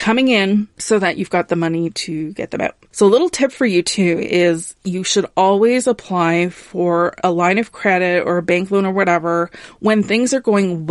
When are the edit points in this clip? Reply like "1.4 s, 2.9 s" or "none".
none